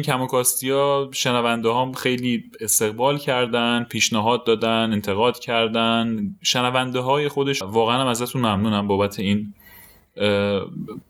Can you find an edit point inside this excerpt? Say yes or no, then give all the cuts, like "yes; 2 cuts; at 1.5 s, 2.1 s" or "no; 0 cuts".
yes; 1 cut; at 7.6 s